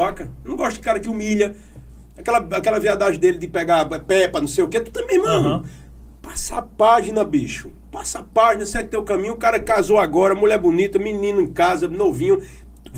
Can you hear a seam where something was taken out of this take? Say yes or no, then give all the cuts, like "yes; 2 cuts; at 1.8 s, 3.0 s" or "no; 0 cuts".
no; 0 cuts